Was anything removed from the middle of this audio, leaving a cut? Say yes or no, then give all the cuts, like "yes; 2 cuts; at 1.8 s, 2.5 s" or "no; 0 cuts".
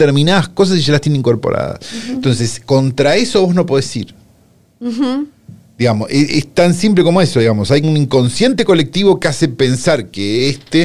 yes; 1 cut; at 7.8 s